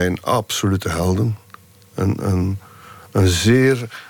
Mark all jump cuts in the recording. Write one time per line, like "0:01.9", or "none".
none